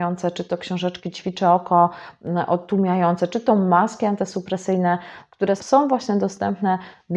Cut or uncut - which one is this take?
cut